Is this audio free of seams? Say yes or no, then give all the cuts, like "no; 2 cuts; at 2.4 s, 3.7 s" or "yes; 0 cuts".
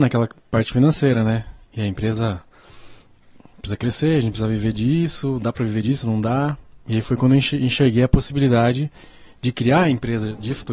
yes; 0 cuts